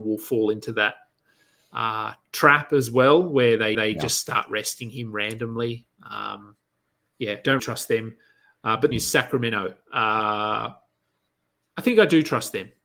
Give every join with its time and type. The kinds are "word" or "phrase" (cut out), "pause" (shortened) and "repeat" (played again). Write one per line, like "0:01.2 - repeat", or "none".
0:03.7 - repeat
0:07.1 - word
0:07.6 - word
0:08.9 - phrase